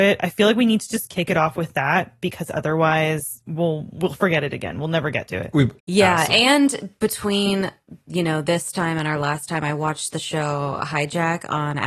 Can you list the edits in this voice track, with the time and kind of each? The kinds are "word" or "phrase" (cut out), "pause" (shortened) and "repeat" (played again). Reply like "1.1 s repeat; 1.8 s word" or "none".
5.8 s pause